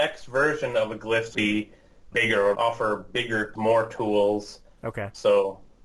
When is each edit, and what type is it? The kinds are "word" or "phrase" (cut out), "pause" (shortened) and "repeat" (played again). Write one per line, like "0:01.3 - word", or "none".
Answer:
0:01.3 - word
0:02.1 - word
0:02.5 - word
0:03.5 - word